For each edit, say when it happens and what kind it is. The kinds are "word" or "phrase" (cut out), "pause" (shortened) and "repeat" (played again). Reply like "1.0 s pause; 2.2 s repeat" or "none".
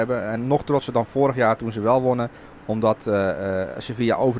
none